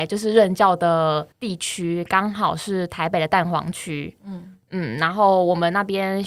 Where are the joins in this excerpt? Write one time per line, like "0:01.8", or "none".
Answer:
0:01.3